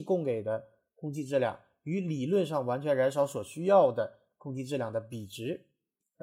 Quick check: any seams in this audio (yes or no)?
no